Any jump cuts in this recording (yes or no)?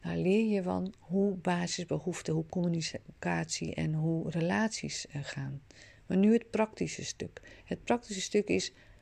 no